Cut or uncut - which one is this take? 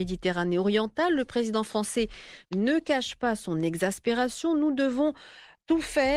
uncut